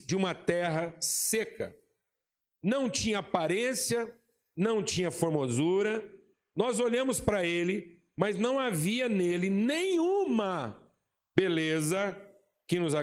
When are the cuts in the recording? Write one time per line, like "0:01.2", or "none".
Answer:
none